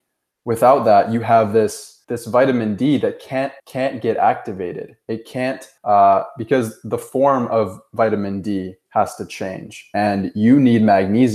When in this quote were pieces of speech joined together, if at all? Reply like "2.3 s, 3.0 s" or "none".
2.0 s, 3.6 s, 5.8 s